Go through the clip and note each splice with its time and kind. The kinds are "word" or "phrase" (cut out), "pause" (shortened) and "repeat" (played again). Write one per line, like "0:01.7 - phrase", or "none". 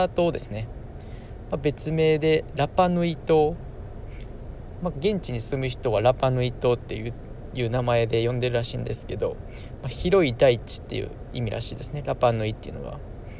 none